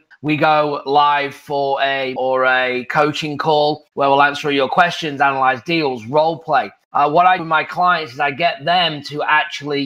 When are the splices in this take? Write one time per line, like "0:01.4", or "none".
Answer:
0:02.2
0:07.4